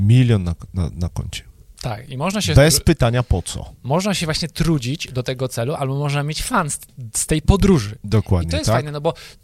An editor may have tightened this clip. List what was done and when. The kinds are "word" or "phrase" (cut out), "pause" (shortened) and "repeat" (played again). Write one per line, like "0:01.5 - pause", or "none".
none